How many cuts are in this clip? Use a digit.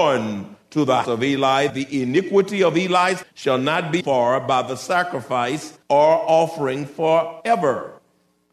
5